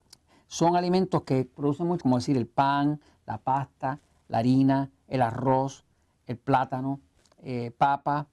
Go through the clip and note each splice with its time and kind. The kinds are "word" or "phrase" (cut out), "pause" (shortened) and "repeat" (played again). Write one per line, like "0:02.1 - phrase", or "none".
0:02.0 - word